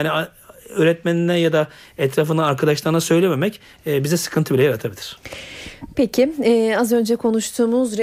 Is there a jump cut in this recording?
no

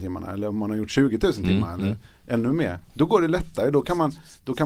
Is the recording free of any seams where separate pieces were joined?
no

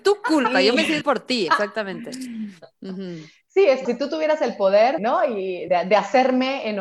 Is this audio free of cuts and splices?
no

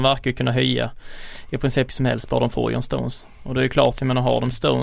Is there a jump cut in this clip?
yes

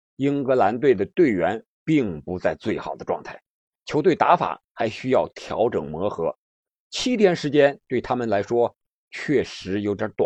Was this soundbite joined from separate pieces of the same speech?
no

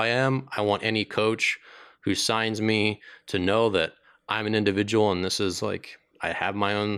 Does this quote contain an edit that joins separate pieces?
no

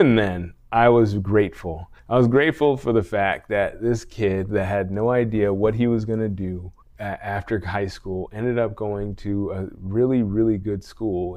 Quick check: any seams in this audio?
yes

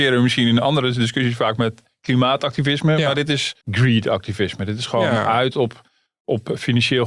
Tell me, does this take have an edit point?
yes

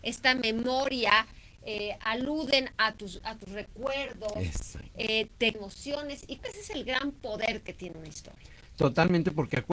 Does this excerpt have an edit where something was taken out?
yes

